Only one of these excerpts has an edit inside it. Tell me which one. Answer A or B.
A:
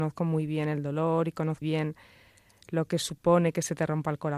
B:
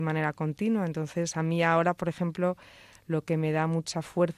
A